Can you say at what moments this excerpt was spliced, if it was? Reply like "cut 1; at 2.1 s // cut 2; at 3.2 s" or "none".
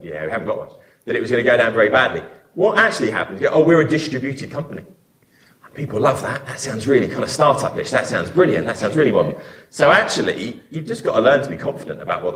none